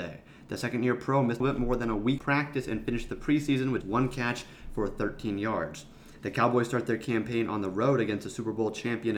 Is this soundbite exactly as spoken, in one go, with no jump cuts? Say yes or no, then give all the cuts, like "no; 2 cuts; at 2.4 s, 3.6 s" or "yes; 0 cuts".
no; 3 cuts; at 1.4 s, 2.2 s, 3.8 s